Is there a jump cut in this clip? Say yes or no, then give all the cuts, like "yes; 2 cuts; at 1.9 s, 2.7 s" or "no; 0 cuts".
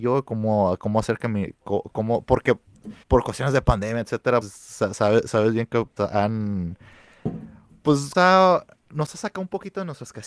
yes; 4 cuts; at 3.0 s, 4.4 s, 6.0 s, 8.1 s